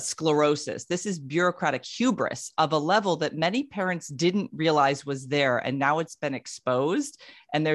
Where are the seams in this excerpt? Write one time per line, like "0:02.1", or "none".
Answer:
none